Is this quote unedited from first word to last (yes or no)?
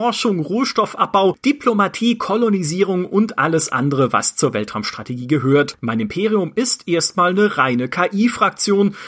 yes